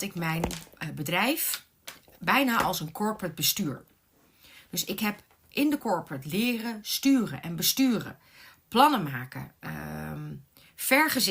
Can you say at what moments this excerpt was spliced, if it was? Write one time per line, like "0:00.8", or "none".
none